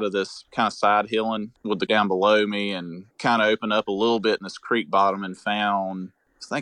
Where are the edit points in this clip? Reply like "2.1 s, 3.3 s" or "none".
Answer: 1.9 s, 3.1 s